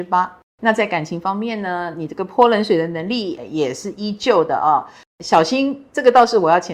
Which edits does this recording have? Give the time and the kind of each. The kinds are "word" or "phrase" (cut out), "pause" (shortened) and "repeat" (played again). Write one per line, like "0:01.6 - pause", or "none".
0:03.4 - word

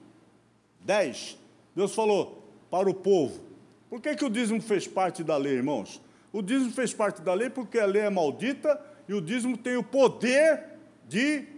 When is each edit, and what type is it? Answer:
none

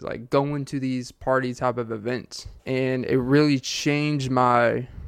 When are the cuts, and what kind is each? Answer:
0:02.6 - pause

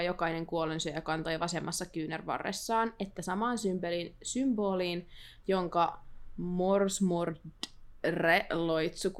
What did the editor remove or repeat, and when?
none

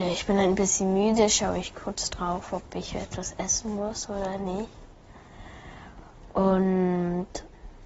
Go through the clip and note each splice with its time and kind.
none

